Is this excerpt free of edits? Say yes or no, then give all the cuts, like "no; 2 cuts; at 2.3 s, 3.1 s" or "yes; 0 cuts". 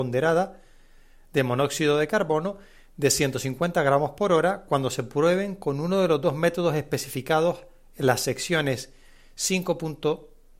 yes; 0 cuts